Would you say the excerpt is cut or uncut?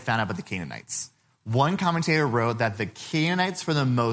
uncut